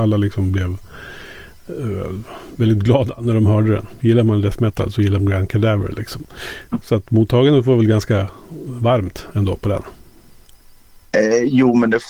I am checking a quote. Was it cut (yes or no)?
yes